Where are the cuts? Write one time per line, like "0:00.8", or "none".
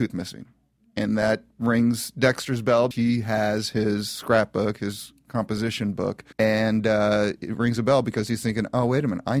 0:01.5
0:02.9
0:06.3